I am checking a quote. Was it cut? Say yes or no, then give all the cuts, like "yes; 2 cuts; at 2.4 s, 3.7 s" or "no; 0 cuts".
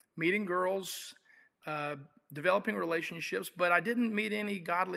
no; 0 cuts